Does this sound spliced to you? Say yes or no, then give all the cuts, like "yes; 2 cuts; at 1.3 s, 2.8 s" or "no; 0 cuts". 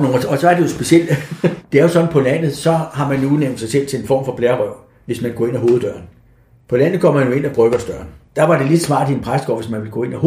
no; 0 cuts